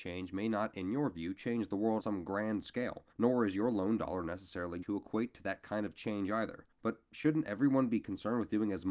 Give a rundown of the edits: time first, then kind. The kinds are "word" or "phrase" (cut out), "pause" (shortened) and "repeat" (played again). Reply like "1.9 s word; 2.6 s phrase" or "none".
2.0 s word; 3.1 s pause; 4.8 s word; 6.7 s pause